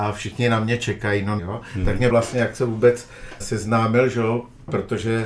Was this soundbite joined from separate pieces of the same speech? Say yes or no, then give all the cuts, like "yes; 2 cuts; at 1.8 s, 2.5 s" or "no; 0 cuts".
yes; 3 cuts; at 1.4 s, 2.1 s, 3.4 s